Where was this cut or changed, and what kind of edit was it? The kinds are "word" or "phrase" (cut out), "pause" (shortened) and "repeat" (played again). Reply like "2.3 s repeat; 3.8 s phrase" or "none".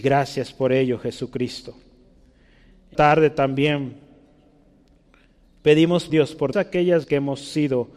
2.9 s word; 6.1 s word; 6.5 s word; 7.0 s word